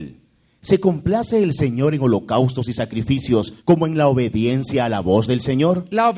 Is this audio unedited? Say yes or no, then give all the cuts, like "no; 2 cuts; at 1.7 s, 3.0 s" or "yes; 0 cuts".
no; 1 cut; at 3.6 s